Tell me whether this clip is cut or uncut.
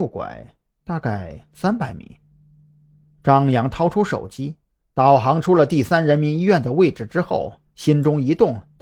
uncut